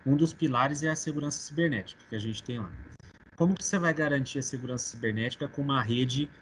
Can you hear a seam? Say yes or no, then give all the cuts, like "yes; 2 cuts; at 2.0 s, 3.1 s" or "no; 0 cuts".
no; 0 cuts